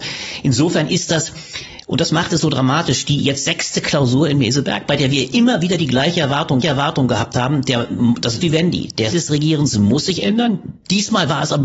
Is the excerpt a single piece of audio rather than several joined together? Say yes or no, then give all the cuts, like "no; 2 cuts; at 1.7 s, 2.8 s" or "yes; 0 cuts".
no; 3 cuts; at 6.6 s, 8.4 s, 9.1 s